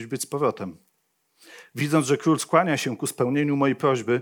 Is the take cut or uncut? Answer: uncut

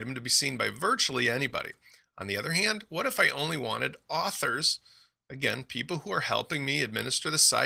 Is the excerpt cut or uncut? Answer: uncut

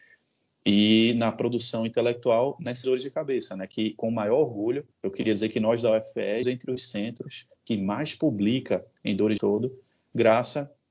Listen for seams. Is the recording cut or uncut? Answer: cut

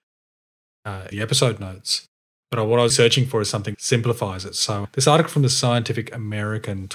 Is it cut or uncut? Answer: cut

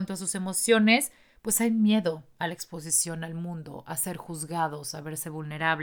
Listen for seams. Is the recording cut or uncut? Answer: uncut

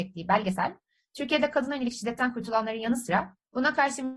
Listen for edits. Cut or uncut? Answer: uncut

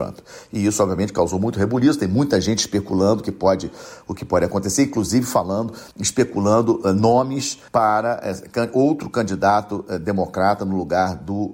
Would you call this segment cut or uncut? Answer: cut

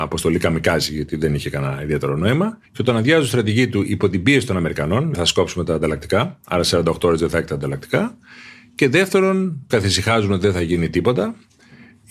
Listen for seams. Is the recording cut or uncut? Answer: cut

